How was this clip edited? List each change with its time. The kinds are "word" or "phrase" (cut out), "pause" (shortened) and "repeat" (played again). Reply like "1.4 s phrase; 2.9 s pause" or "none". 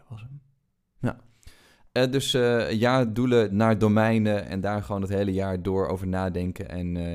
none